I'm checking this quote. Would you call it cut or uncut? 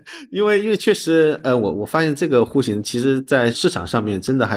uncut